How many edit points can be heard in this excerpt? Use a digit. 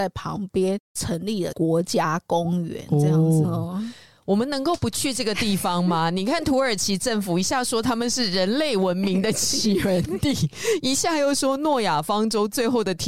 1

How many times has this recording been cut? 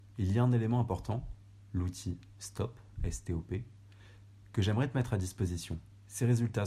0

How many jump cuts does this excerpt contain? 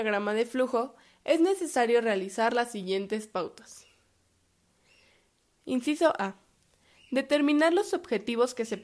0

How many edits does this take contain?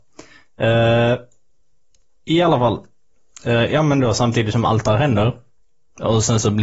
0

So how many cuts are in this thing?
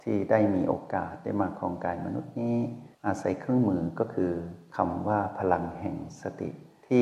1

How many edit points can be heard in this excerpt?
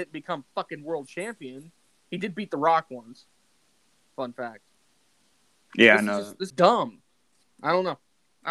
1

